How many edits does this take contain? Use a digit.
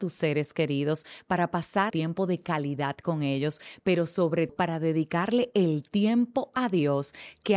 2